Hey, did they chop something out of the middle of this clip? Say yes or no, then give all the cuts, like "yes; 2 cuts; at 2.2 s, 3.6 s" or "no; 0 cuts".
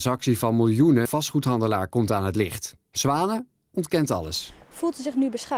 yes; 2 cuts; at 1.0 s, 2.8 s